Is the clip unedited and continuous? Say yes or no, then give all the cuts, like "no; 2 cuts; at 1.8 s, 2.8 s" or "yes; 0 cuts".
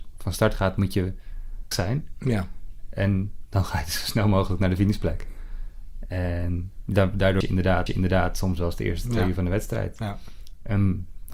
no; 3 cuts; at 1.7 s, 7.4 s, 7.9 s